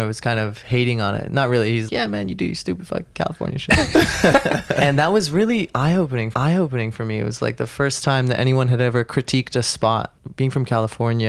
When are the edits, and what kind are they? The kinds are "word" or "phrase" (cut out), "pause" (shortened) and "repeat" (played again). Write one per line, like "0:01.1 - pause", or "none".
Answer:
0:01.9 - word
0:06.3 - repeat